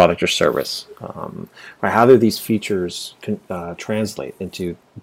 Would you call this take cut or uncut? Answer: uncut